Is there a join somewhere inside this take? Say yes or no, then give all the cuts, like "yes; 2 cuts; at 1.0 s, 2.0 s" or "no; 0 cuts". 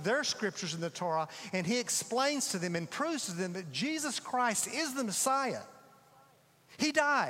no; 0 cuts